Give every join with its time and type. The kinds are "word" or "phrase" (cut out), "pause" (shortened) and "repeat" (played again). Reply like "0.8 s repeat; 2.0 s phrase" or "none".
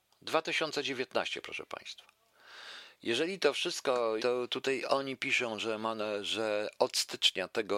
4.2 s word